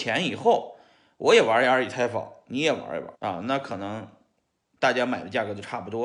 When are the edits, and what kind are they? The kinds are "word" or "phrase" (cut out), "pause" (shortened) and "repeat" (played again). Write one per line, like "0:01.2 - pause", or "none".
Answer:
0:03.1 - pause